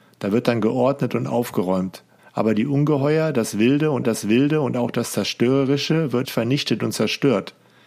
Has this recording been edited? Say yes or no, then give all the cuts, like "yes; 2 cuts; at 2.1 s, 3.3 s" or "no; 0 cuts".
yes; 3 cuts; at 2.2 s, 4.0 s, 6.2 s